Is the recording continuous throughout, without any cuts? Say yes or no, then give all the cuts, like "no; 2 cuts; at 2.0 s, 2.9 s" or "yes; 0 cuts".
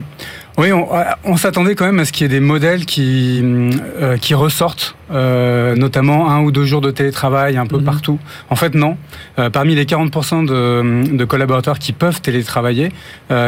yes; 0 cuts